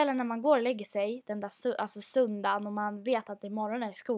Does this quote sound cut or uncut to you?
uncut